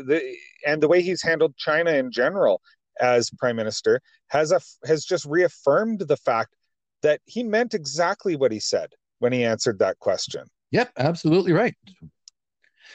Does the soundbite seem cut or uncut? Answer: uncut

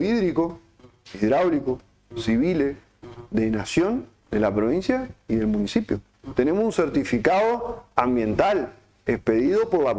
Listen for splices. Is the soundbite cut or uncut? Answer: uncut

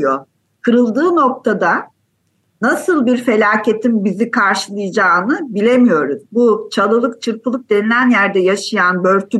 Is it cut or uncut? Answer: uncut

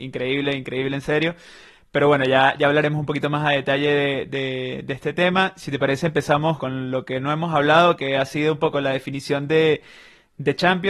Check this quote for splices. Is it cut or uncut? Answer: cut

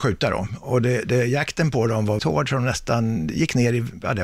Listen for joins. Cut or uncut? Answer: cut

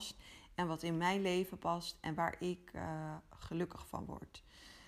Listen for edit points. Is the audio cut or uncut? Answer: uncut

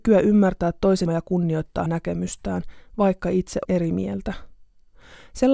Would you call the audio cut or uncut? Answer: cut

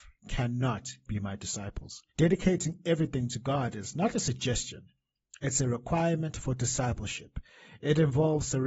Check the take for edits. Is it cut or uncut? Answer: cut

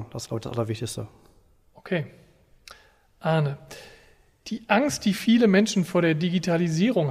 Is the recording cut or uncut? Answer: uncut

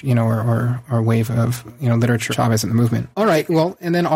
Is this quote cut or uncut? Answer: cut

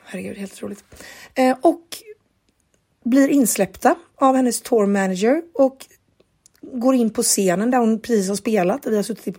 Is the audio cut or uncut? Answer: uncut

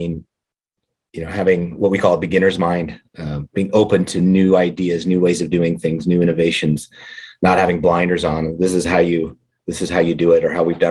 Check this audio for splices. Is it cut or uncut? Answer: uncut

